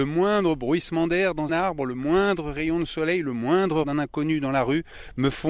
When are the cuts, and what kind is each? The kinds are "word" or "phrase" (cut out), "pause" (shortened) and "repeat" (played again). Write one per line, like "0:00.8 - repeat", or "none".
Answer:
0:01.5 - word
0:03.8 - word